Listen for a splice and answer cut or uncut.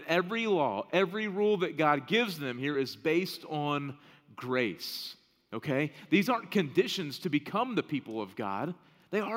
uncut